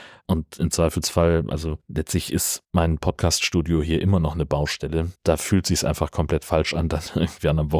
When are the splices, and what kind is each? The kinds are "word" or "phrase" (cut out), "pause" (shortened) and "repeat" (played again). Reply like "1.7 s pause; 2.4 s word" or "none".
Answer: 2.6 s pause; 5.2 s pause

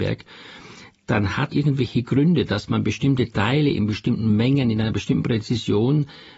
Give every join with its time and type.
1.5 s phrase

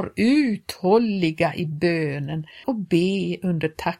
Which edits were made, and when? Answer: 2.6 s word

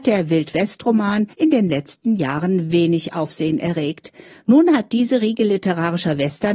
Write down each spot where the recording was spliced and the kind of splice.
1.3 s pause

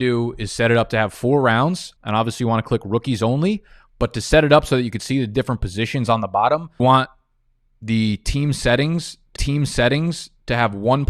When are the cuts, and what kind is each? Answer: 2.0 s pause; 6.8 s word; 9.4 s repeat

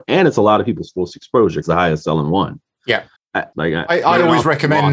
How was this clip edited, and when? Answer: 1.6 s phrase; 3.2 s word; 3.5 s phrase

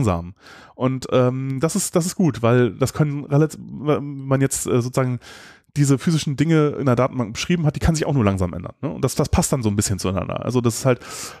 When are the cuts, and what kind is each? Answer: none

